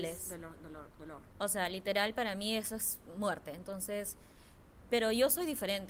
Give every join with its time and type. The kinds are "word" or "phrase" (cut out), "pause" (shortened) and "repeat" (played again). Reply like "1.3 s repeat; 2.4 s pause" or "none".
none